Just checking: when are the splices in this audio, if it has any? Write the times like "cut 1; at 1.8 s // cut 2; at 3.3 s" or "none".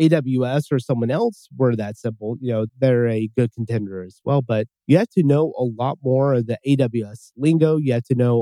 cut 1; at 2.7 s // cut 2; at 4.8 s